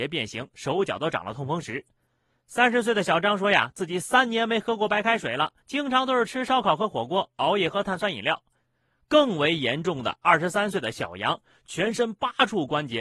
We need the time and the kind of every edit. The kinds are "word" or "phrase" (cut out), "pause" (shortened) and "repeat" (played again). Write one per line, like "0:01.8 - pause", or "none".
0:05.6 - pause

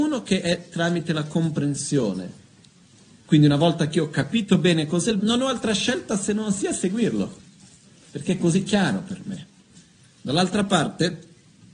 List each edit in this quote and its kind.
0:05.2 - word

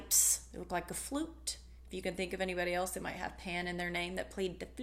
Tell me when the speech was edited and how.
none

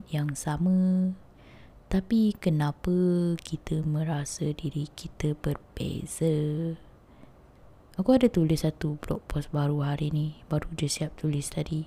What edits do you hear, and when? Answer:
none

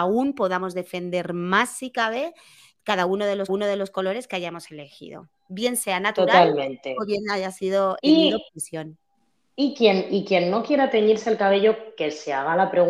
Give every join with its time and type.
0:03.5 - repeat
0:08.0 - word
0:08.5 - pause

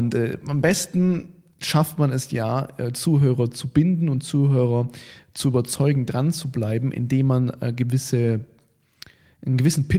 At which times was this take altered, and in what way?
none

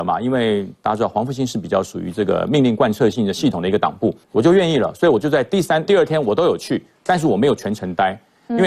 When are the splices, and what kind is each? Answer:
0:04.2 - pause
0:05.9 - phrase

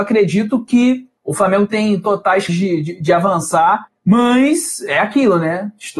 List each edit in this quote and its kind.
0:01.2 - pause
0:02.5 - word

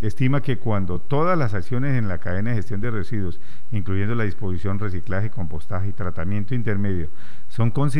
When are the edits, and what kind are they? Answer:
none

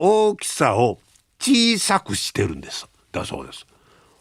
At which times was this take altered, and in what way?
none

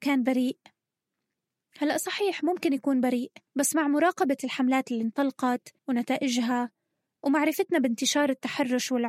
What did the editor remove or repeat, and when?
0:03.5 - pause
0:05.8 - pause

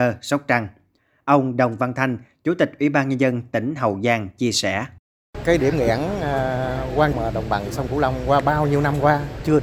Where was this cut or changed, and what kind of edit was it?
0:07.1 - word

